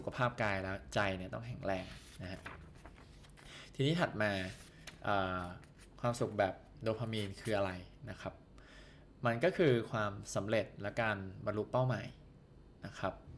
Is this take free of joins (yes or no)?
yes